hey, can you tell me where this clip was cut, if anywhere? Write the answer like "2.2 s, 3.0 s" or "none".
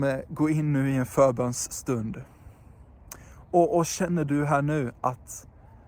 none